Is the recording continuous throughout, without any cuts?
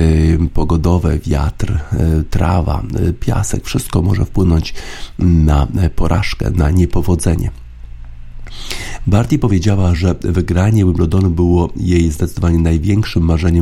yes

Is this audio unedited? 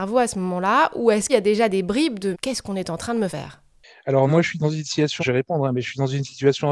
no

